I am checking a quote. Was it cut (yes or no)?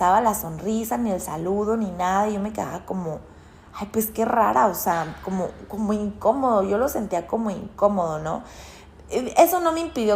no